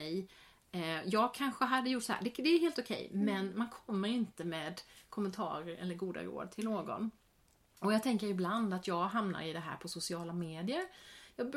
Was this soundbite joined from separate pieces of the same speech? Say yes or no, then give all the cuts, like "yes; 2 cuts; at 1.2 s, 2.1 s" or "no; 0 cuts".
no; 0 cuts